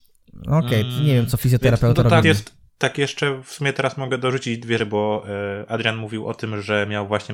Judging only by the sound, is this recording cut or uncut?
cut